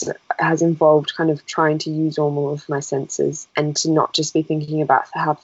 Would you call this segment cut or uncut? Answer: uncut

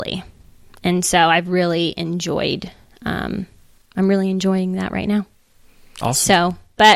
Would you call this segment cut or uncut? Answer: uncut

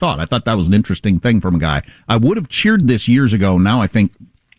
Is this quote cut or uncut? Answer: uncut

